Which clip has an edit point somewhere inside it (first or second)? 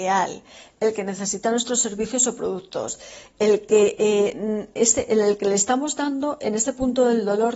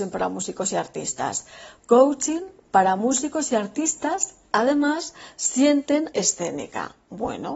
second